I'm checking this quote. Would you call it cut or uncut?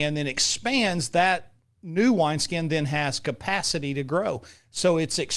uncut